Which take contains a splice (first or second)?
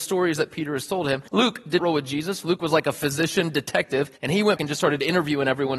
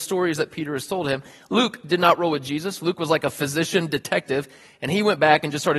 first